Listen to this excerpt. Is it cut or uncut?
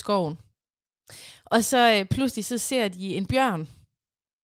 uncut